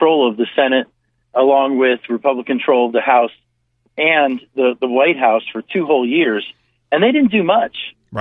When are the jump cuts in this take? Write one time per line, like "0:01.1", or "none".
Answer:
none